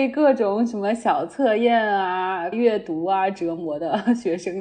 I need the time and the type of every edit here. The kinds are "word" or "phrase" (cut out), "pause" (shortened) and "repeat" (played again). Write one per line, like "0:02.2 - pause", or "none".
0:02.5 - phrase